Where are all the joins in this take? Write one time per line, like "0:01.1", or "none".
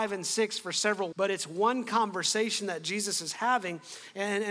0:01.1